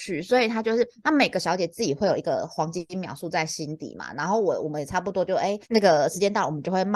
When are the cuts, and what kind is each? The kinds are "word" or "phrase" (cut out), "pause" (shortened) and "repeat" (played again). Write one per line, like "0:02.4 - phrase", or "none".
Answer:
0:05.6 - pause